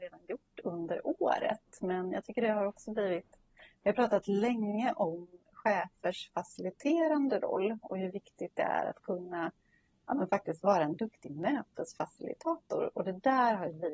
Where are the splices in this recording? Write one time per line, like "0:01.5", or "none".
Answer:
none